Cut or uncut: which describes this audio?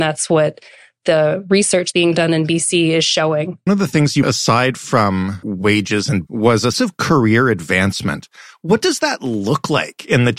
cut